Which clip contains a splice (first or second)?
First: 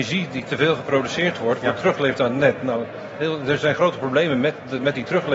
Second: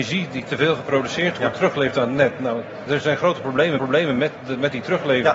second